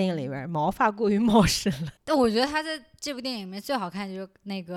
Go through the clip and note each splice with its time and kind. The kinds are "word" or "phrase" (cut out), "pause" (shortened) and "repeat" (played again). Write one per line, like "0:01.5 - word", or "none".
0:02.0 - pause

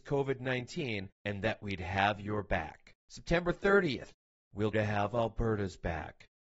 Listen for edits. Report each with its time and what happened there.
0:01.1 - pause
0:03.0 - pause
0:04.7 - word

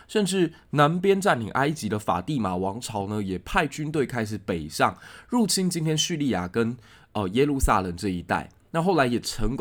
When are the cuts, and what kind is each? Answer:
none

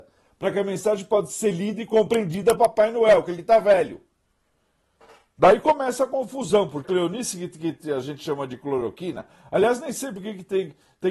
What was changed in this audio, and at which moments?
0:02.6 - word
0:06.8 - word

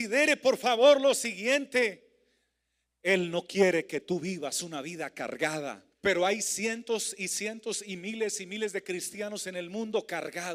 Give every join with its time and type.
0:05.9 - pause

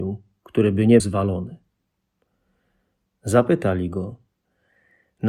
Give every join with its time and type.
0:01.0 - word

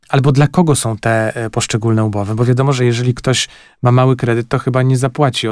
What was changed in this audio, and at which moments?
none

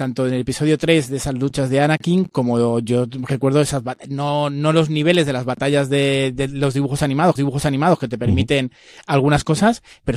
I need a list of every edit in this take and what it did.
0:07.4 - repeat

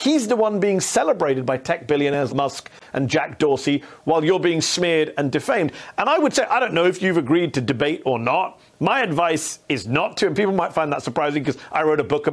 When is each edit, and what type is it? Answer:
0:02.3 - word

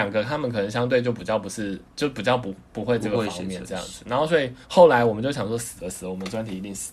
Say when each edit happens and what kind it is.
0:01.8 - pause
0:04.6 - pause

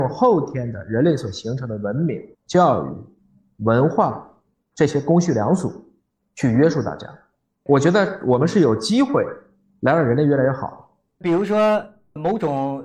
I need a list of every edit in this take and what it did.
0:02.3 - pause

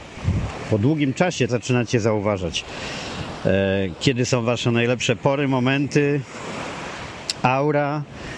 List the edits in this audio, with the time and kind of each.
0:01.5 - phrase

